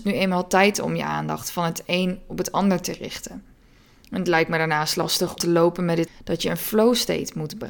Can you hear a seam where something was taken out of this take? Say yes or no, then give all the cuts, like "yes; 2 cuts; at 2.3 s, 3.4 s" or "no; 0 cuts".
yes; 2 cuts; at 5.4 s, 6.1 s